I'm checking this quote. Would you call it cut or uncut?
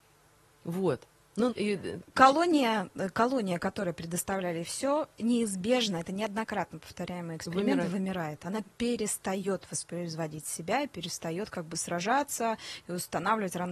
cut